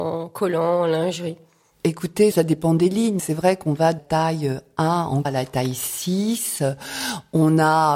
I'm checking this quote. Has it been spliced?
yes; 4 cuts; at 2.3 s, 3.2 s, 4.0 s, 5.2 s

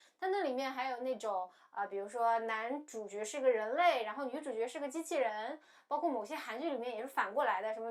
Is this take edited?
no; 0 cuts

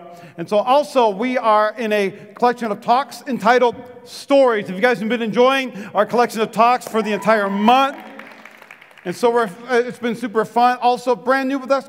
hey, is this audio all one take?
yes; 0 cuts

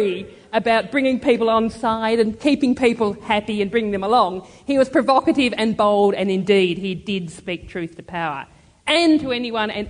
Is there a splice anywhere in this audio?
no; 0 cuts

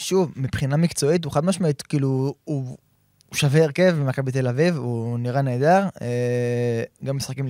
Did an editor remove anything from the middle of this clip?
no; 0 cuts

